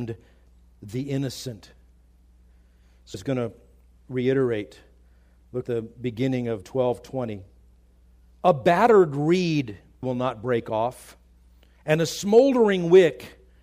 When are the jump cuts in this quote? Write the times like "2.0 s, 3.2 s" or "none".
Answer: 3.1 s, 5.6 s, 6.6 s, 10.0 s